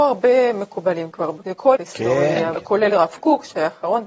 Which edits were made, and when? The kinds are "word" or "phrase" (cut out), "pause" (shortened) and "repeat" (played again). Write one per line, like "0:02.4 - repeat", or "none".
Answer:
0:01.8 - word
0:02.6 - word